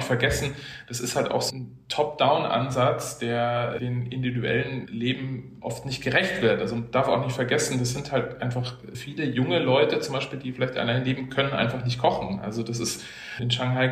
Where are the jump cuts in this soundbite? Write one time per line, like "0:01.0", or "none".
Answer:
none